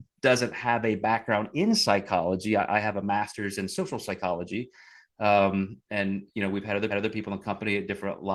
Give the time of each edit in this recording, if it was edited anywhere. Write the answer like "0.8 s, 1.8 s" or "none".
6.9 s